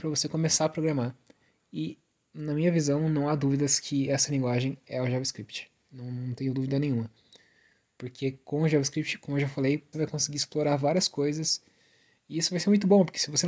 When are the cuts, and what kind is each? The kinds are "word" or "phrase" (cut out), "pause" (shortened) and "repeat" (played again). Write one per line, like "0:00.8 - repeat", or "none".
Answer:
0:09.9 - phrase